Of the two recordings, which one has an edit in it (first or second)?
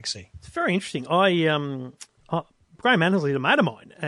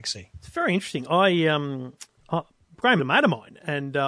second